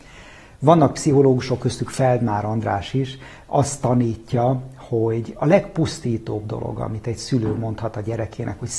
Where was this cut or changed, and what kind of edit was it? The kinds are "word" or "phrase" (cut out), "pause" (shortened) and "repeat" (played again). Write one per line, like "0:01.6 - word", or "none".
none